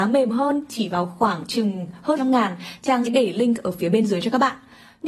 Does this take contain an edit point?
yes; 2 cuts; at 2.2 s, 3.1 s

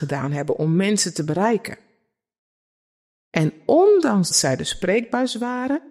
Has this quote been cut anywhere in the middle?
yes; 1 cut; at 4.3 s

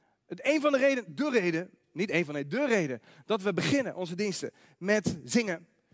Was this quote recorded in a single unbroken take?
yes; 0 cuts

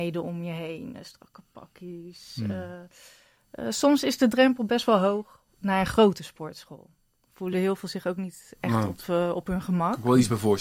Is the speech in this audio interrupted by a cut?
no; 0 cuts

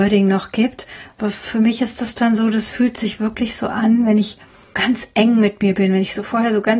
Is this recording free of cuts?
no; 1 cut; at 4.7 s

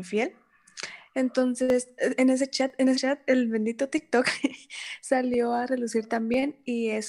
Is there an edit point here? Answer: yes; 1 cut; at 2.9 s

